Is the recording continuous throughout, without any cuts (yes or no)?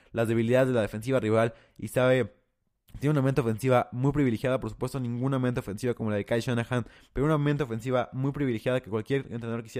yes